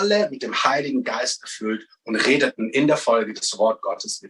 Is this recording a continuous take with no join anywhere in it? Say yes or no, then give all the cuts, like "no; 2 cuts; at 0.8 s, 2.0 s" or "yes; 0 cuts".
yes; 0 cuts